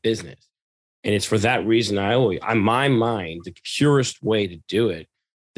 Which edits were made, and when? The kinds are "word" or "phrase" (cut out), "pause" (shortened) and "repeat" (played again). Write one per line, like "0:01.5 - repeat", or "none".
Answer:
none